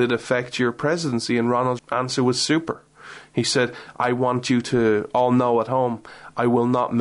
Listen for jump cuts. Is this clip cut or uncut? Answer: cut